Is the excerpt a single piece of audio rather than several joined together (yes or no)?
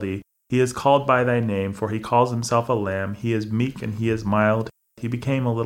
yes